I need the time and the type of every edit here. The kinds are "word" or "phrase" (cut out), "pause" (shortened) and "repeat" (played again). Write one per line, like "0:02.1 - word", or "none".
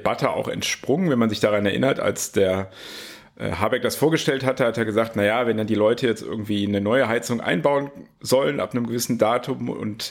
none